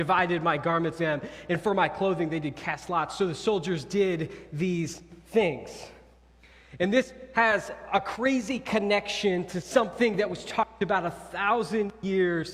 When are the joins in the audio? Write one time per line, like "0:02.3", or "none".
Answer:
0:01.0